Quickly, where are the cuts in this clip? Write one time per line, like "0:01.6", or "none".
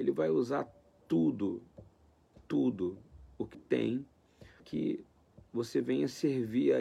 0:03.5
0:04.6